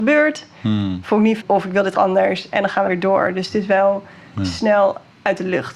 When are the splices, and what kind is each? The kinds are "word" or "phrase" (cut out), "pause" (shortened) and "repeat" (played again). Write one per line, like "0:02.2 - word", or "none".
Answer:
0:01.4 - word
0:01.9 - word
0:02.9 - word